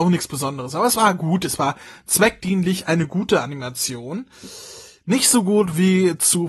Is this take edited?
no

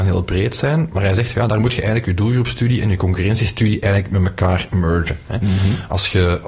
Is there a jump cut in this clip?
no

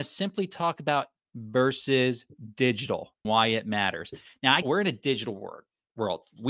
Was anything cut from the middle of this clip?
yes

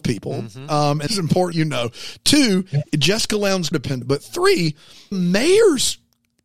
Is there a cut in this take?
yes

